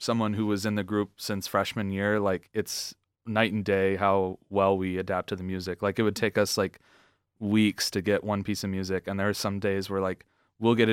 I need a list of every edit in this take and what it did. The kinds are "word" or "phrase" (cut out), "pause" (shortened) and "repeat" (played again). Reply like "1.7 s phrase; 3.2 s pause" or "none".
none